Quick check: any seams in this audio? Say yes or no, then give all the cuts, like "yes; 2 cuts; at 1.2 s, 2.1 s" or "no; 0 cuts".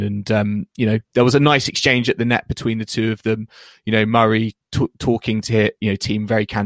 no; 0 cuts